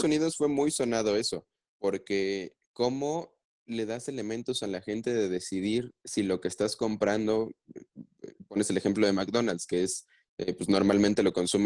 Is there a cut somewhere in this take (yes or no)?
no